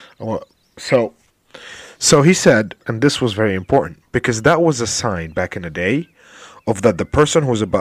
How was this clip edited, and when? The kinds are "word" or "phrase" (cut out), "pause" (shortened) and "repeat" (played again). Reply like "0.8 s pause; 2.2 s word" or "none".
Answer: 2.8 s pause